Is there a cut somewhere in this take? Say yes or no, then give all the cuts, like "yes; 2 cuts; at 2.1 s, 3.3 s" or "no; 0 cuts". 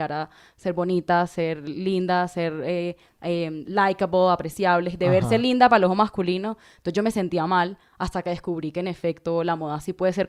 no; 0 cuts